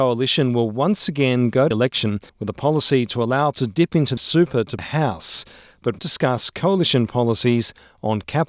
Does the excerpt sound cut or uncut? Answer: cut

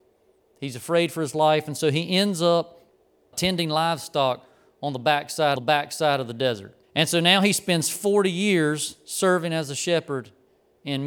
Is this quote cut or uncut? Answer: cut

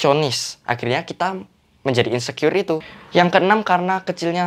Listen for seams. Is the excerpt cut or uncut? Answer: uncut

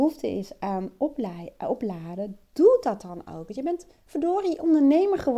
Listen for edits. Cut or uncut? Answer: uncut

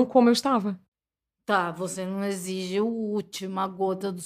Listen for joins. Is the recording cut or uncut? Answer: uncut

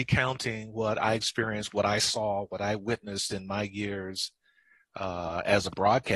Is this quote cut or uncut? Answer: uncut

